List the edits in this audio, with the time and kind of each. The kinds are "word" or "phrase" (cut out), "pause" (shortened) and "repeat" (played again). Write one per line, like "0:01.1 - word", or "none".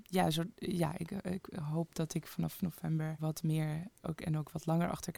0:03.2 - word

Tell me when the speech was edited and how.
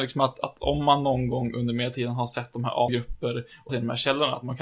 0:02.9 - phrase
0:03.7 - word

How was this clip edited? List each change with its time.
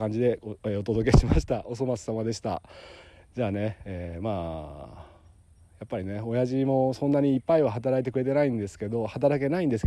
none

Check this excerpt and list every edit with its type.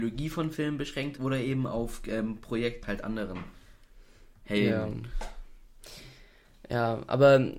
0:01.2 - word
0:02.8 - word

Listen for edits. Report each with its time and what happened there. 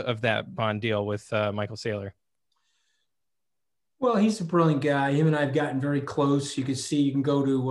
none

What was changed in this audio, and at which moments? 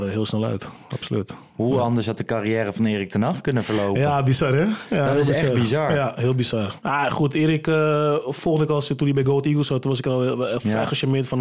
none

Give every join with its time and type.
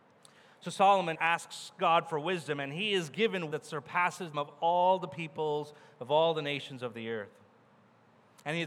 0:01.1 - word
0:03.5 - word
0:04.3 - word

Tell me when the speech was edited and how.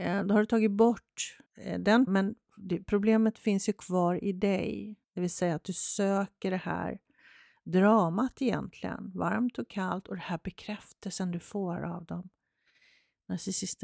0:01.5 - pause
0:02.1 - word
0:05.0 - pause

